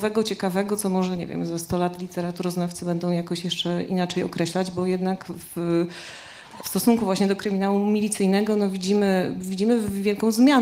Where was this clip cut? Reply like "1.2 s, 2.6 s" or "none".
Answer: none